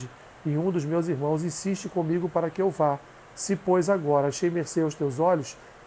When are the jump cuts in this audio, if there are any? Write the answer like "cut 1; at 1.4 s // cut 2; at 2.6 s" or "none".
none